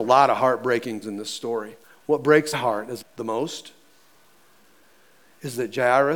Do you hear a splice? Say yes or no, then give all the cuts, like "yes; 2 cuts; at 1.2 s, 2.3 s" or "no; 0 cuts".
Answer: yes; 4 cuts; at 1.0 s, 1.8 s, 2.5 s, 3.0 s